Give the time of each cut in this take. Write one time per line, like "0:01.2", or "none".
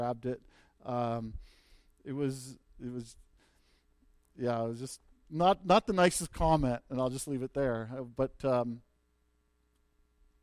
none